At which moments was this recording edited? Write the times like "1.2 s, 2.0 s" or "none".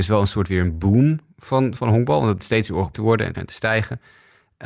1.8 s, 2.4 s, 2.9 s, 3.3 s

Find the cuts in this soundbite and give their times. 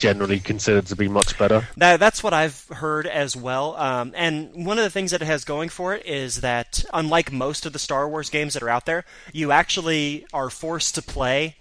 none

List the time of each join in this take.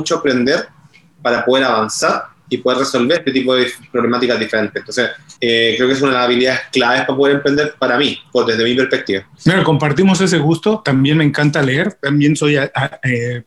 5.4 s

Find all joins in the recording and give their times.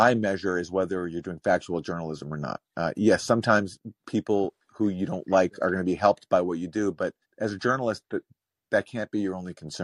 4.0 s, 7.2 s

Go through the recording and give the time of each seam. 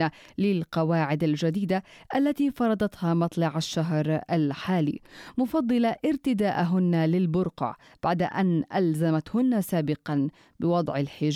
none

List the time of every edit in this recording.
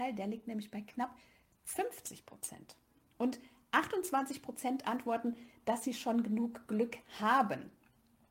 none

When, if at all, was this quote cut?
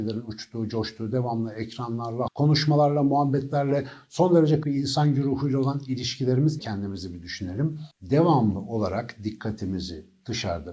2.3 s, 4.6 s, 6.6 s, 7.9 s

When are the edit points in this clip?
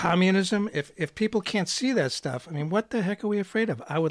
none

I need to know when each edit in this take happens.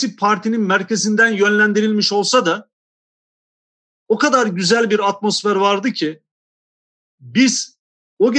none

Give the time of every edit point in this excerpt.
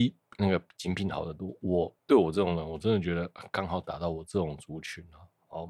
2.0 s

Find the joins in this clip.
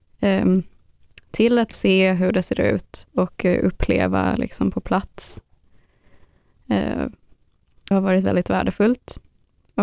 1.7 s, 3.1 s, 7.9 s

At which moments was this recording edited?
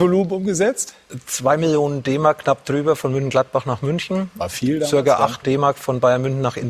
5.4 s

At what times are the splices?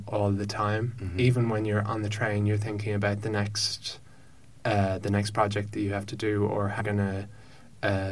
6.8 s

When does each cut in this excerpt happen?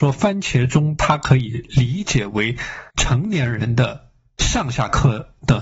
2.9 s

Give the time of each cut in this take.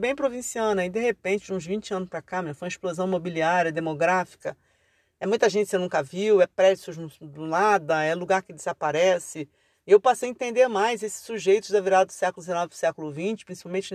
none

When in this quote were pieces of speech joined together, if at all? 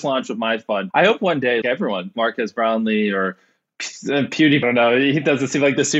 0.9 s, 1.6 s, 2.1 s, 4.6 s

